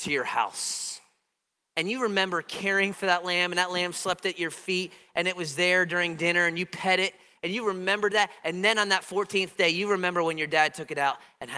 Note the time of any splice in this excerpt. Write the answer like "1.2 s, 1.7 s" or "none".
none